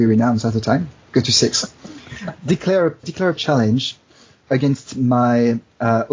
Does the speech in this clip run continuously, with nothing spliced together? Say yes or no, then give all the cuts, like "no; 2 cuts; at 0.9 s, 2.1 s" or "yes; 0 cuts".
no; 3 cuts; at 3.0 s, 3.4 s, 4.4 s